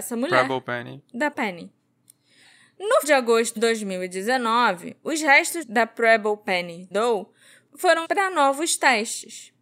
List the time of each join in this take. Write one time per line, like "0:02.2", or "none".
0:01.3
0:03.0
0:03.6
0:05.6
0:06.9
0:08.0